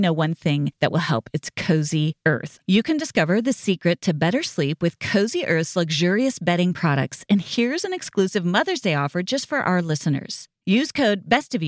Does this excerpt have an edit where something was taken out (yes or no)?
no